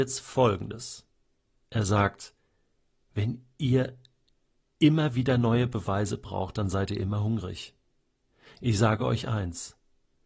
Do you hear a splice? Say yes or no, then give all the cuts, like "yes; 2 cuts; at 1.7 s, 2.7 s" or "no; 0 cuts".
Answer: no; 0 cuts